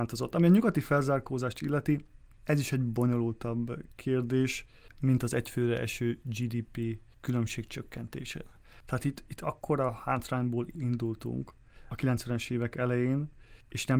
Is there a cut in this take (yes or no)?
no